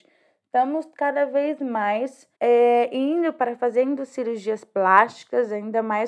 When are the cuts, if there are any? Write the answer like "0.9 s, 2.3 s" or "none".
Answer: 2.3 s